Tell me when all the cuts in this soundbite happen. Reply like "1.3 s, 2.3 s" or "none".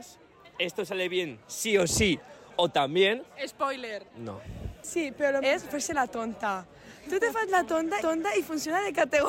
1.4 s, 4.1 s, 5.4 s, 8.0 s

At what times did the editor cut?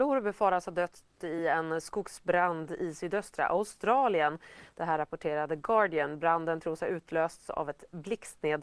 none

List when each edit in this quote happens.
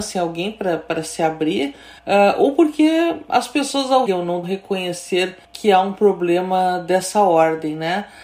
2.0 s, 4.1 s, 4.4 s, 5.4 s

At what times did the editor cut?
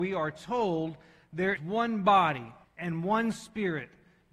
1.6 s, 2.6 s

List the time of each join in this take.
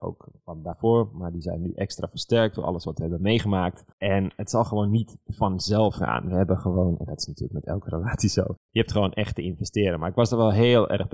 3.9 s, 8.6 s

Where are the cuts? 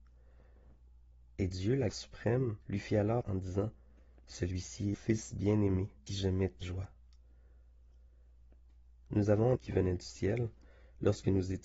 1.9 s, 2.6 s, 3.2 s, 4.9 s, 6.1 s, 6.6 s, 9.6 s

